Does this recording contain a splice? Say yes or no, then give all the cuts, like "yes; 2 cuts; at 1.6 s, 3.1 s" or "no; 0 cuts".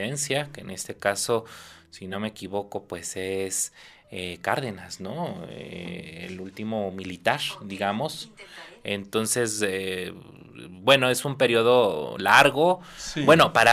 no; 0 cuts